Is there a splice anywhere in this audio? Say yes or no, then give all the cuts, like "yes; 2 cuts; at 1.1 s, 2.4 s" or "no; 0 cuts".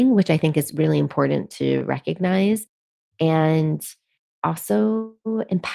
no; 0 cuts